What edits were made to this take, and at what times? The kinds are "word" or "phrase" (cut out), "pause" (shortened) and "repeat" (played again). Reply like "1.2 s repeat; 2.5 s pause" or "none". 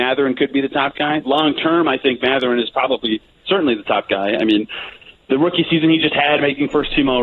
none